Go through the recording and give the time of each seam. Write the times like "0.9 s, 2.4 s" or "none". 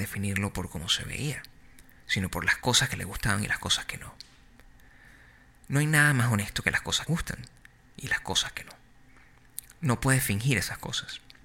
7.1 s